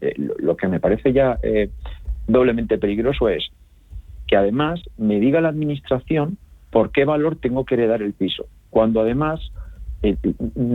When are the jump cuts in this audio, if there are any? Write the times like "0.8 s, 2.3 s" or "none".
none